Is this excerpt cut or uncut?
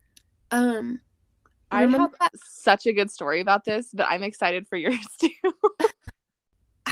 uncut